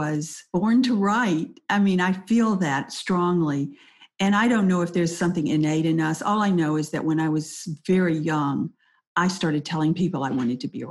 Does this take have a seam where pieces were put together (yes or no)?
no